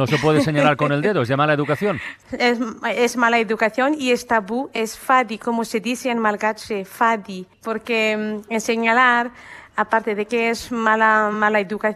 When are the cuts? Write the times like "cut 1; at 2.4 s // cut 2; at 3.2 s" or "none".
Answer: none

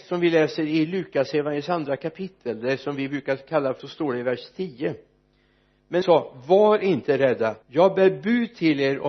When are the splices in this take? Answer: cut 1; at 3.8 s // cut 2; at 6.0 s // cut 3; at 7.6 s

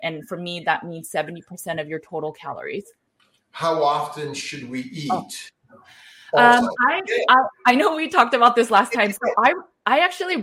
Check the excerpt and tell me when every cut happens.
cut 1; at 3.1 s

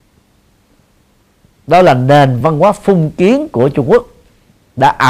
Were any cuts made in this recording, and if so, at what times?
none

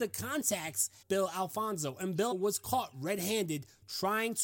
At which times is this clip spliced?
cut 1; at 1.0 s // cut 2; at 2.3 s

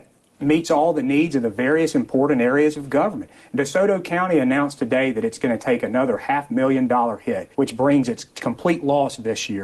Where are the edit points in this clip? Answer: cut 1; at 7.5 s

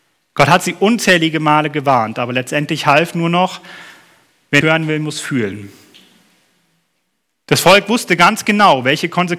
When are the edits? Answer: cut 1; at 4.6 s

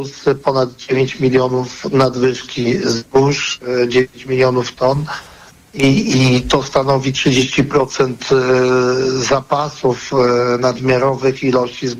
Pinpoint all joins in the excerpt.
none

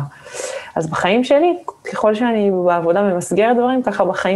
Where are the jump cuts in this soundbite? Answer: none

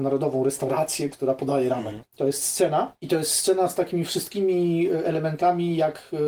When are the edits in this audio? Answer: none

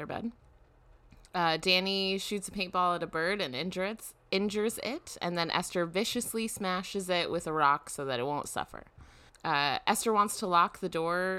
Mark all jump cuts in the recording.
cut 1; at 9.3 s

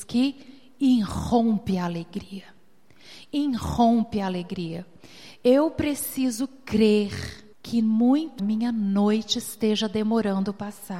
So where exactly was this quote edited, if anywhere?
cut 1; at 7.5 s // cut 2; at 8.4 s

